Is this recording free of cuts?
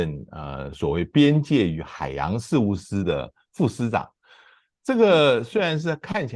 yes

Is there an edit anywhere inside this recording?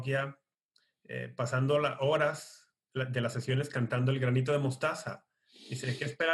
no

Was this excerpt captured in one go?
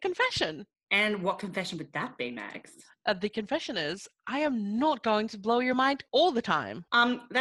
yes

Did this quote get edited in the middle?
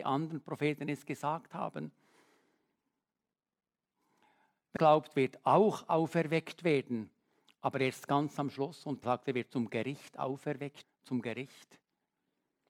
yes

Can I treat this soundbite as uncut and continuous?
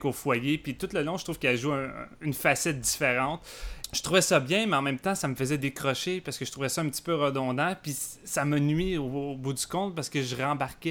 yes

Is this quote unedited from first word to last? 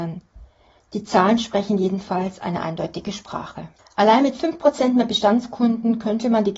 no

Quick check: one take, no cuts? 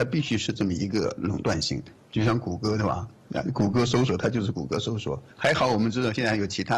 no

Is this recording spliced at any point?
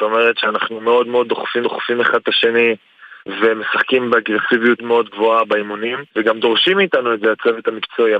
yes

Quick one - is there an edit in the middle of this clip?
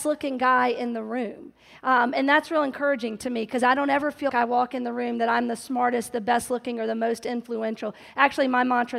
yes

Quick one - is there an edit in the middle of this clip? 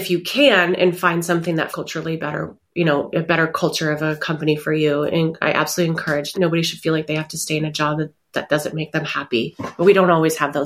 yes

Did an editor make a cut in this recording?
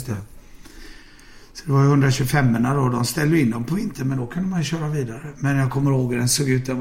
no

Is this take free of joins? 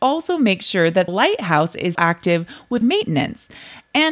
no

